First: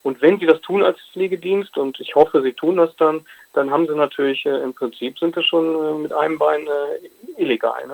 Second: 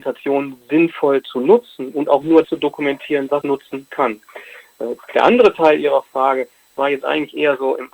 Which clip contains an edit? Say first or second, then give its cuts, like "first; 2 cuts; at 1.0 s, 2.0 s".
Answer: second; 2 cuts; at 2.4 s, 3.4 s